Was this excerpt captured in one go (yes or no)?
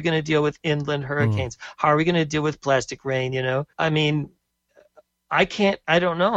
no